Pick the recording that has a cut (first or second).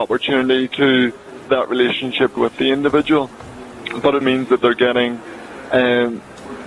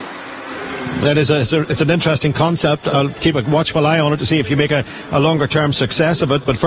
first